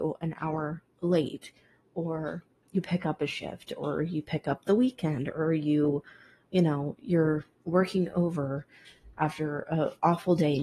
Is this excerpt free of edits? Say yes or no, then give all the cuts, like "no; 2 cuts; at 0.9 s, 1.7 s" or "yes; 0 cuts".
yes; 0 cuts